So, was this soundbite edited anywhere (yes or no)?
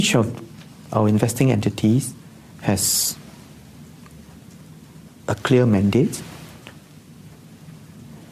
no